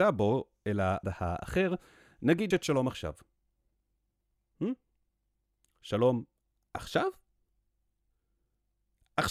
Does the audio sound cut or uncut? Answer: cut